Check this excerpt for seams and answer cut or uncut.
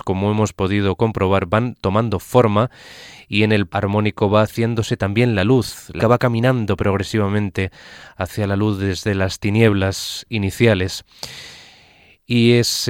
cut